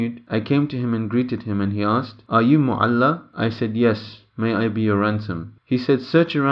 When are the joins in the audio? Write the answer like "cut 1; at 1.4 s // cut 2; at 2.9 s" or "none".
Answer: cut 1; at 5.6 s